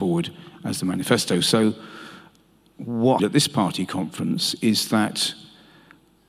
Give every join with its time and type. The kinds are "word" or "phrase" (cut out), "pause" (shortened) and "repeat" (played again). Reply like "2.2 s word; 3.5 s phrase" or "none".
3.2 s word